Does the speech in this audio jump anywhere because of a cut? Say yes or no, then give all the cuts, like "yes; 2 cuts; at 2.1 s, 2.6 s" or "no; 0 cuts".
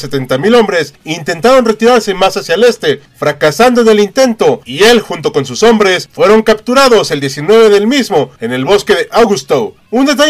no; 0 cuts